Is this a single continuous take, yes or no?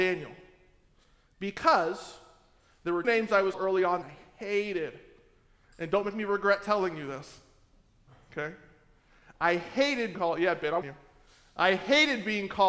no